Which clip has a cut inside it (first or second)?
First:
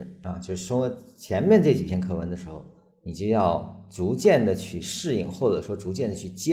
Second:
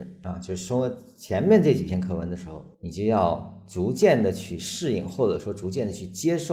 second